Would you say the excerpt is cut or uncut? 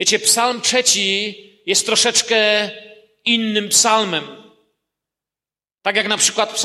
uncut